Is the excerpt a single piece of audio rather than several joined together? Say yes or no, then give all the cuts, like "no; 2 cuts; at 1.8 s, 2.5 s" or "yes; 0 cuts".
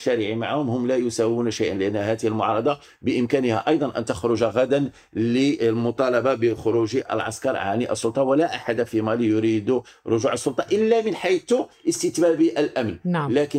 yes; 0 cuts